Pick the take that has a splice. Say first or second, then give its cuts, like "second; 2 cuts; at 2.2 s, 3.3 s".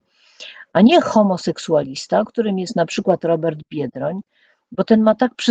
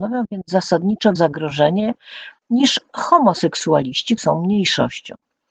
second; 2 cuts; at 1.2 s, 4.2 s